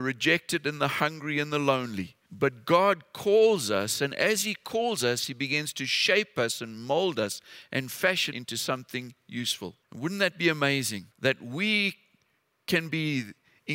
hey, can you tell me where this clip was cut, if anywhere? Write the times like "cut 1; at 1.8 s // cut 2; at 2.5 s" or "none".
cut 1; at 2.3 s // cut 2; at 8.3 s // cut 3; at 9.8 s // cut 4; at 11.1 s